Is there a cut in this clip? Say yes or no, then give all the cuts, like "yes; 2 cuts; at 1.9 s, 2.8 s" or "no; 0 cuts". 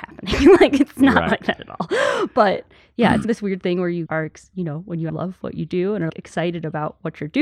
yes; 4 cuts; at 3.2 s, 4.1 s, 5.1 s, 6.1 s